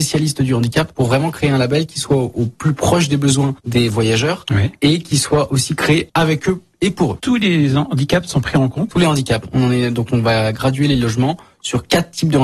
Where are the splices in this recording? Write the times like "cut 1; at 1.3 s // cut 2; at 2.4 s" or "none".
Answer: none